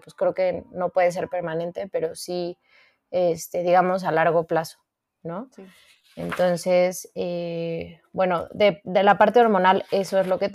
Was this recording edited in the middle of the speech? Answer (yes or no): no